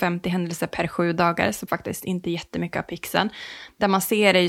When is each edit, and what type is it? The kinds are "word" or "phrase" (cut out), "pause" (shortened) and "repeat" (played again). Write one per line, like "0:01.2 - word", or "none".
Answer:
0:01.7 - word